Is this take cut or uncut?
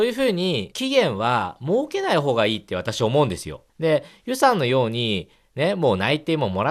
uncut